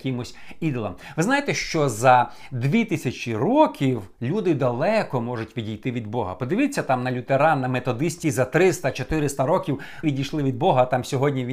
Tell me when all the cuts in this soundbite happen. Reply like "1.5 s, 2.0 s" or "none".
8.2 s, 10.0 s